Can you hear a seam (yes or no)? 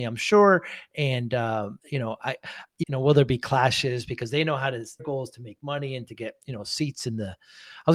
yes